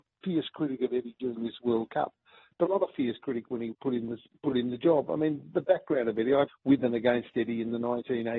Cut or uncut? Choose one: cut